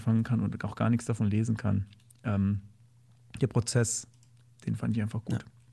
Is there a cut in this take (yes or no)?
no